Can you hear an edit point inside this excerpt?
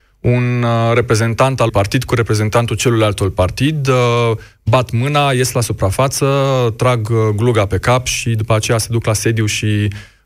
yes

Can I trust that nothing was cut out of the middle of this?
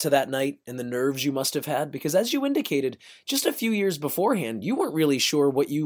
yes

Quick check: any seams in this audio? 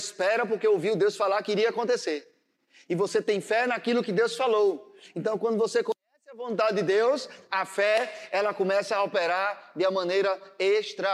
no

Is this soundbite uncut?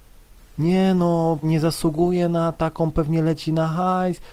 no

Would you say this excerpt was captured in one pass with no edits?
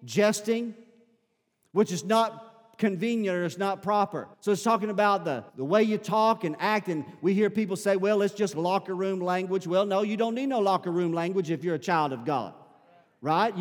no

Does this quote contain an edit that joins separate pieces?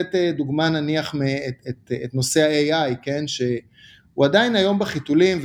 no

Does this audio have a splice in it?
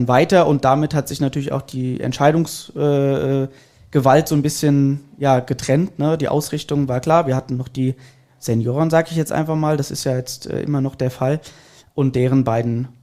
no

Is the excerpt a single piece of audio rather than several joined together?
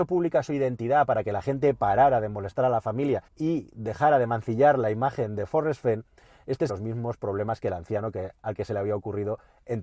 no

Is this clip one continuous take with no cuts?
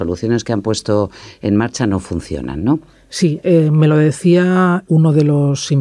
yes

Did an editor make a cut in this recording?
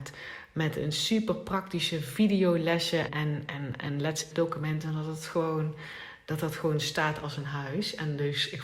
yes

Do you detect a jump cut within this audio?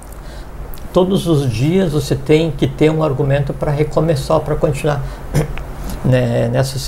no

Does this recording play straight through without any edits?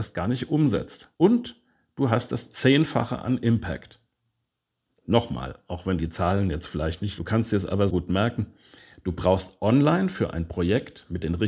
no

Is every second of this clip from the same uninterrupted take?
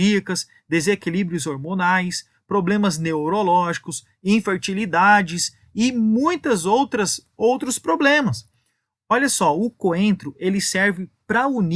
yes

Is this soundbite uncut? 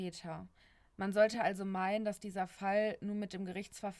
yes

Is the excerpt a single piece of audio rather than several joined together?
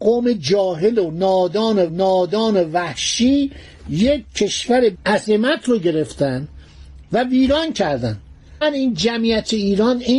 no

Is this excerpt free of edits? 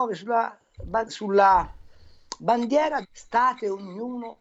no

